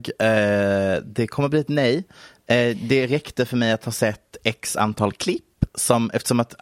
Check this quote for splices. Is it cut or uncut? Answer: uncut